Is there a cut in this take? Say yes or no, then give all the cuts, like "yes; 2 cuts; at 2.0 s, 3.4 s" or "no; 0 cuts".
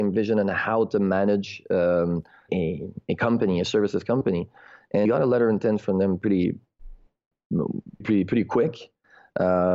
yes; 3 cuts; at 2.5 s, 5.0 s, 8.0 s